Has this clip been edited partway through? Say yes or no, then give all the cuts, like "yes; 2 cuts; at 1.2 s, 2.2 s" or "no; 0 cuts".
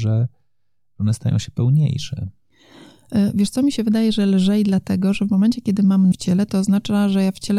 yes; 1 cut; at 6.1 s